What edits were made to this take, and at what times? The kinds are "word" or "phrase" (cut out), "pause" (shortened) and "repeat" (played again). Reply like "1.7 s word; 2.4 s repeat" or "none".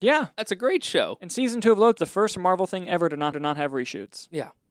2.0 s word; 3.3 s repeat